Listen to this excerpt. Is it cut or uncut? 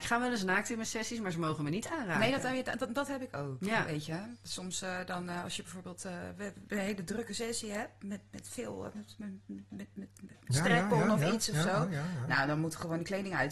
cut